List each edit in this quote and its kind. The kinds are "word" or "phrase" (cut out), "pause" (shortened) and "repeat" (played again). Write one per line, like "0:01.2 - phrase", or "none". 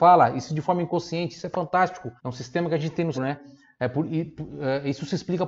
0:02.2 - pause
0:03.1 - word